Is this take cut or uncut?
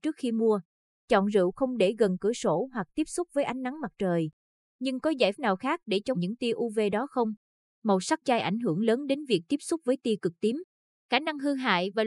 cut